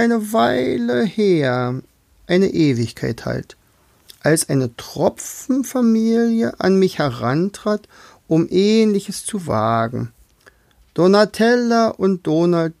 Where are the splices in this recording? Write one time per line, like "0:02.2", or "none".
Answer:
none